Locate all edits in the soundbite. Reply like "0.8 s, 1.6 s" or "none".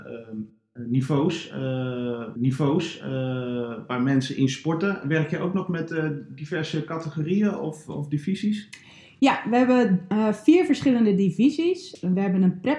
2.3 s